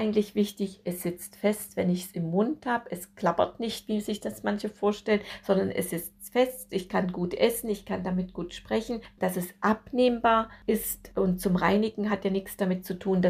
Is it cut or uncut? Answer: uncut